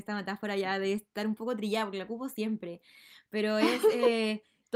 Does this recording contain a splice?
no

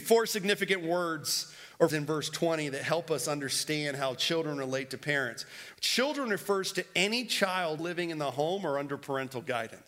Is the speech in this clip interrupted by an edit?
yes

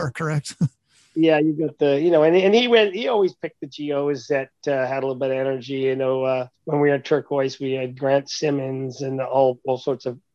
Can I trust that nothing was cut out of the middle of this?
yes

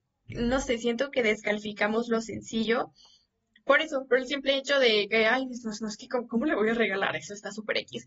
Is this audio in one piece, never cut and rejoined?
no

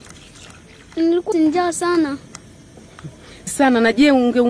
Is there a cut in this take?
yes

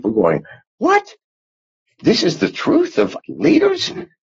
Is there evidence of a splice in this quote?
yes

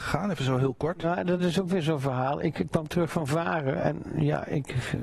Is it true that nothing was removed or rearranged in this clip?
yes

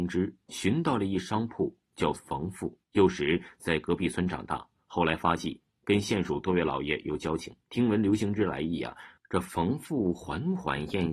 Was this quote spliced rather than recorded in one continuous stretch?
yes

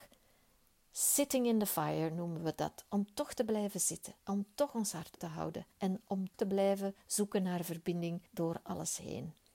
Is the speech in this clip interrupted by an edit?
yes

